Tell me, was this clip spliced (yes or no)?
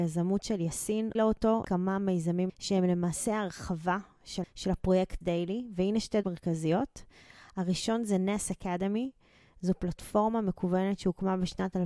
yes